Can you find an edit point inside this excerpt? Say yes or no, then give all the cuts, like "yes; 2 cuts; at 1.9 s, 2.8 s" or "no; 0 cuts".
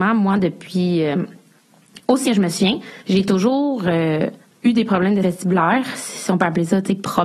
yes; 4 cuts; at 2.3 s, 3.0 s, 4.4 s, 5.2 s